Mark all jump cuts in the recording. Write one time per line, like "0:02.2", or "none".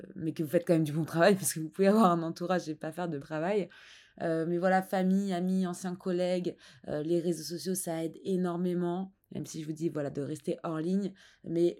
0:03.2